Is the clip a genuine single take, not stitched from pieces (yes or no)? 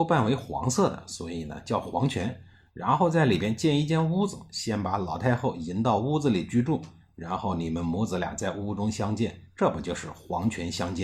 yes